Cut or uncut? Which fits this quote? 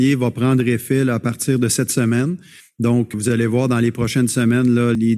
uncut